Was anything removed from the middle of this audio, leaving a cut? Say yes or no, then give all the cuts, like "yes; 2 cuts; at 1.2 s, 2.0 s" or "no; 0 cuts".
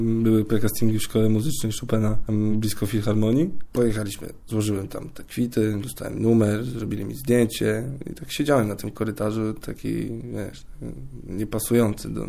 no; 0 cuts